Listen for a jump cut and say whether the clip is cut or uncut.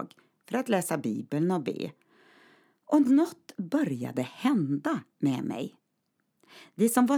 uncut